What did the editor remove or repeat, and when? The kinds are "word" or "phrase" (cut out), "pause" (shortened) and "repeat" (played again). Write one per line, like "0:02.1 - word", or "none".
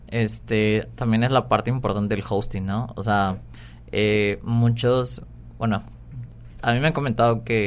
none